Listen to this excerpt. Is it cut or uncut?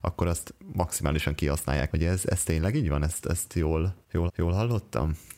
cut